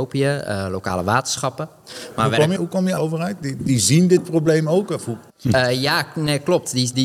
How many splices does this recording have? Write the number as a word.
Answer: four